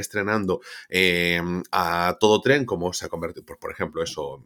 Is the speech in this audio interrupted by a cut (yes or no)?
no